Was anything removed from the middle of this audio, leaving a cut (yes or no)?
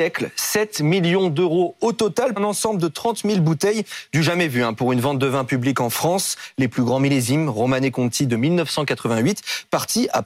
yes